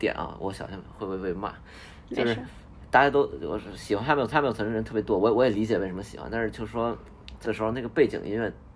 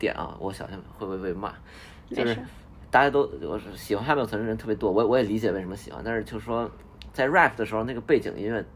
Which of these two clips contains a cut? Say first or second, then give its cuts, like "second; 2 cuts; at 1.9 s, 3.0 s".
first; 2 cuts; at 4.3 s, 7.4 s